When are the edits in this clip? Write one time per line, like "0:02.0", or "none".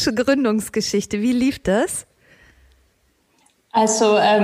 none